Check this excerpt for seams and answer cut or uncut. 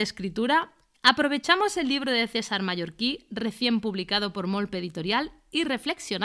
uncut